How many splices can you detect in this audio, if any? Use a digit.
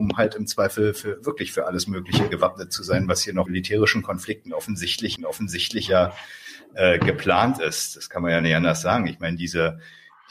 2